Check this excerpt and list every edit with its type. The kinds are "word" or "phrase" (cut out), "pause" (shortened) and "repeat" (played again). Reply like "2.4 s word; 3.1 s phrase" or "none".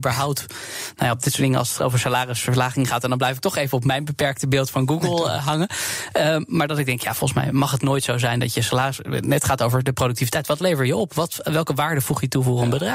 none